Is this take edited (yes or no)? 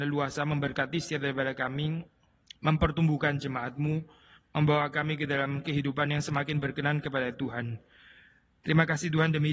no